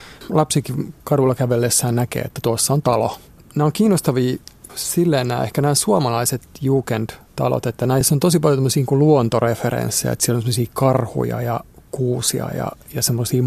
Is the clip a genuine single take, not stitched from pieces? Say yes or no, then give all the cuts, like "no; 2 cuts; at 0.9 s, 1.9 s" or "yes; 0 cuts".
yes; 0 cuts